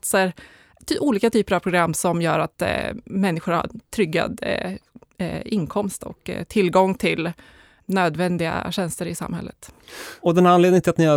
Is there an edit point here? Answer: no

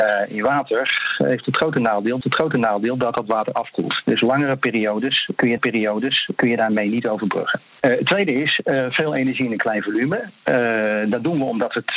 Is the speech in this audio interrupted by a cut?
yes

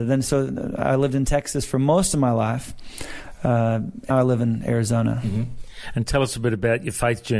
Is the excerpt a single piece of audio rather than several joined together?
no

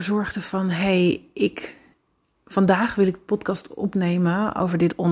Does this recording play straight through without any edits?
yes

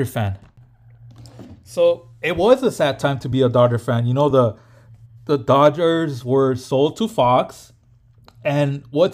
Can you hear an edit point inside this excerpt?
no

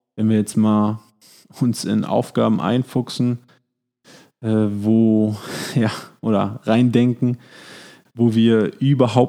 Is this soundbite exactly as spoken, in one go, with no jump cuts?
yes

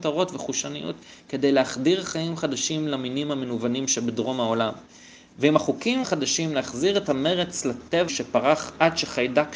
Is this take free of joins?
no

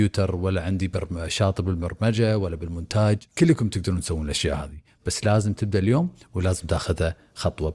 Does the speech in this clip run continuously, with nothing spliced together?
no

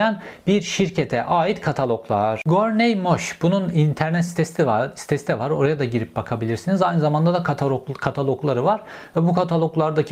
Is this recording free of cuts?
yes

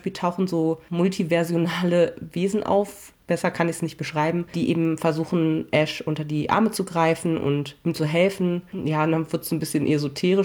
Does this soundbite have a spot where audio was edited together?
no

